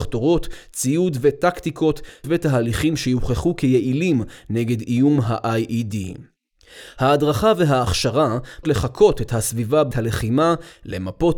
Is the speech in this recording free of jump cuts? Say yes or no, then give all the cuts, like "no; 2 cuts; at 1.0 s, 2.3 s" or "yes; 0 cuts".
no; 3 cuts; at 2.2 s, 8.6 s, 9.9 s